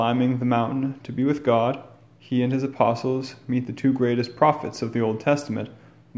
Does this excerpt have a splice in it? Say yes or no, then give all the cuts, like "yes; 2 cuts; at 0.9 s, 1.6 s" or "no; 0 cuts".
no; 0 cuts